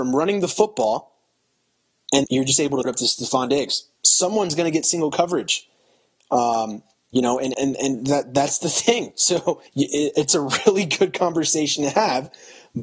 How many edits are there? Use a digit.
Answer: 6